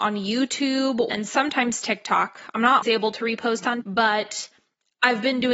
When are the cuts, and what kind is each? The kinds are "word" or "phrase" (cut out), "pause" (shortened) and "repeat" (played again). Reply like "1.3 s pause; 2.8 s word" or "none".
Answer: 1.1 s phrase; 2.8 s word; 3.8 s word